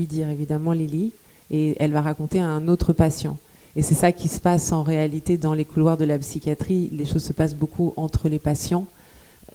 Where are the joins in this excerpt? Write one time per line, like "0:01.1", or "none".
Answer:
none